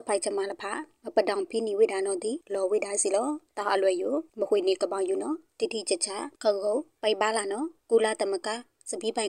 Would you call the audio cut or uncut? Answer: cut